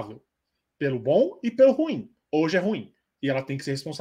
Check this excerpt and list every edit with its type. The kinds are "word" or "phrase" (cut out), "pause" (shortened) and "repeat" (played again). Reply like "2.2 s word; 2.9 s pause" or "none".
2.2 s pause